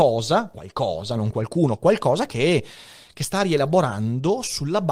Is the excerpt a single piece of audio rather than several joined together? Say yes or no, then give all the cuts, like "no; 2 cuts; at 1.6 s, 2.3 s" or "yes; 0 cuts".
yes; 0 cuts